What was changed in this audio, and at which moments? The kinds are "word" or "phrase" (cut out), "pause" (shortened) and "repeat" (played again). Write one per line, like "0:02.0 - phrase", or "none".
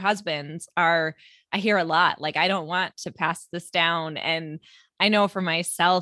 none